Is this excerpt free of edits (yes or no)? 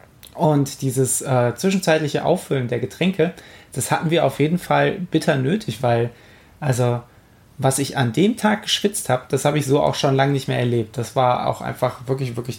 yes